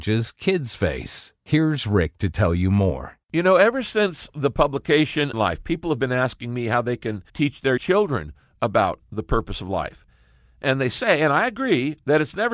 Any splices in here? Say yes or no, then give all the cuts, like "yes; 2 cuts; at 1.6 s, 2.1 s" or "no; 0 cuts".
yes; 4 cuts; at 3.2 s, 5.3 s, 7.3 s, 7.8 s